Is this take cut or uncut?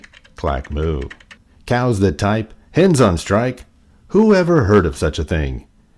uncut